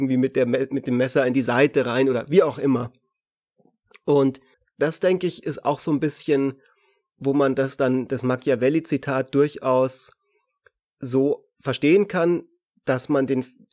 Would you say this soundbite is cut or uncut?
cut